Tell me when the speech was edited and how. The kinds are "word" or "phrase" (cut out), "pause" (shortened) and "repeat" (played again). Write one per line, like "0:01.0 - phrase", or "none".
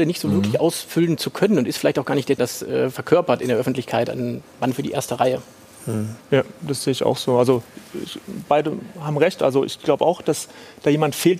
0:02.4 - phrase
0:06.2 - pause